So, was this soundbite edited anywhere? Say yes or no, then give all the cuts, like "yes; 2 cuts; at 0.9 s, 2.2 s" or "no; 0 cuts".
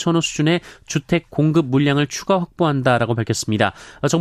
no; 0 cuts